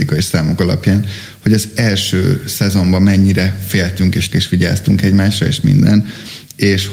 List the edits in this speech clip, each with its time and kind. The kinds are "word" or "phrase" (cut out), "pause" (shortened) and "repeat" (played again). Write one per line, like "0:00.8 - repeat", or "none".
0:04.3 - word